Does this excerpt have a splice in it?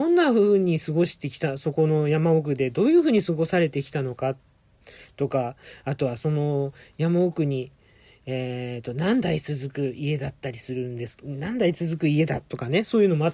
no; 0 cuts

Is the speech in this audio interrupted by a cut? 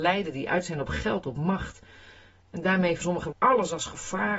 yes; 2 cuts; at 3.0 s, 3.3 s

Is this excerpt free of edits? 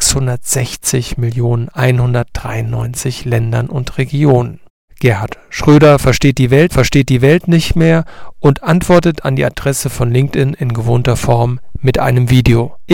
no; 3 cuts; at 1.7 s, 4.7 s, 6.7 s

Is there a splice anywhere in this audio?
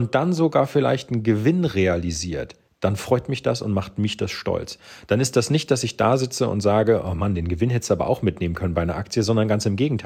yes; 1 cut; at 2.7 s

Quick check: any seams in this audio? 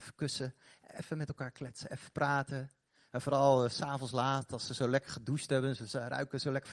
no; 0 cuts

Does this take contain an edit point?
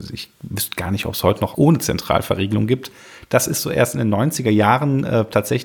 yes; 1 cut; at 1.5 s

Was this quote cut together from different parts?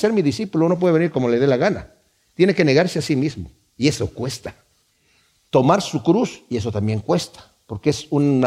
no; 0 cuts

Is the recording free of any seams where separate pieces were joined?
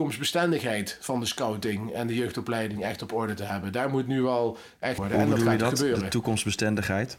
no; 1 cut; at 5.0 s

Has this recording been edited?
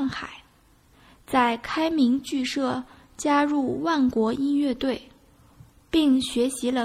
no; 0 cuts

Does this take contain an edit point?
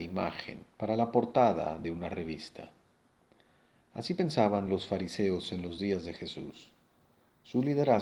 no; 0 cuts

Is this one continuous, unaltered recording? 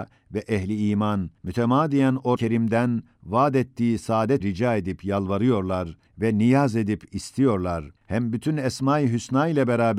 no; 5 cuts; at 1.4 s, 2.4 s, 4.4 s, 6.1 s, 8.0 s

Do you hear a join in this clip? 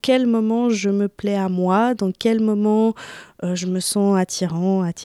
no; 0 cuts

